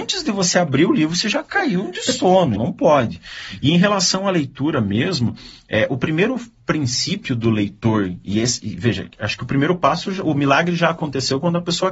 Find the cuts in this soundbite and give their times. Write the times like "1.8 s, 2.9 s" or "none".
2.6 s